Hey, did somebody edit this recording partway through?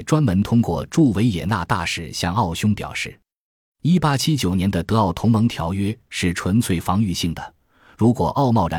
no; 0 cuts

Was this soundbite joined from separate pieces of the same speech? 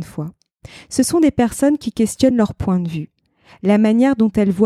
no; 0 cuts

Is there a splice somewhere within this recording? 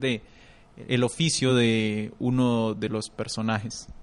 no; 0 cuts

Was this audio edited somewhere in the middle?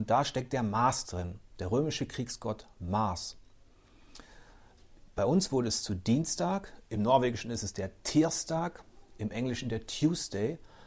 no; 0 cuts

